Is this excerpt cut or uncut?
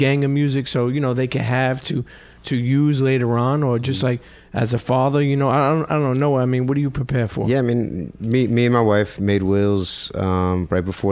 uncut